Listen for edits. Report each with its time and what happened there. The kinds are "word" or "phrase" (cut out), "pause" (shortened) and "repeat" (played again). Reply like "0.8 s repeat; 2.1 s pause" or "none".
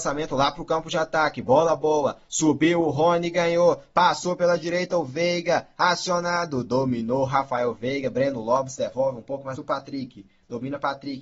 9.6 s word